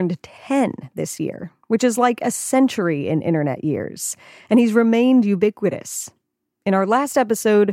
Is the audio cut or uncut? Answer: uncut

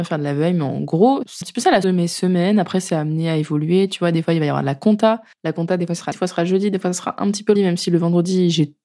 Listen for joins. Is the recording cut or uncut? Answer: cut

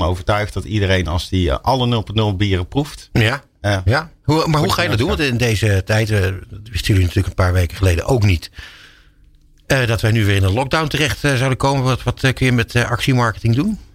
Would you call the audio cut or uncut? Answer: uncut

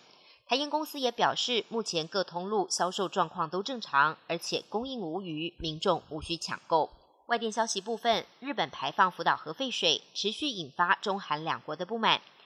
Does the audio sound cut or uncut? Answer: uncut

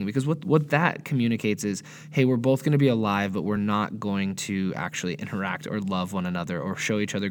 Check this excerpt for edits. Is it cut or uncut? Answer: uncut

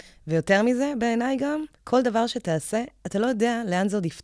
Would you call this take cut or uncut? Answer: cut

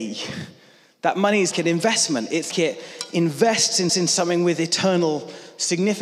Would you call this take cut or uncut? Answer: cut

